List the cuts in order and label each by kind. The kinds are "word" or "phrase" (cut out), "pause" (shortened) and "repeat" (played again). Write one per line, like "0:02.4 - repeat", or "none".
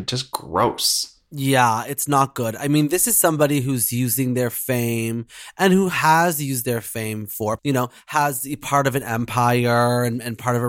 0:07.6 - word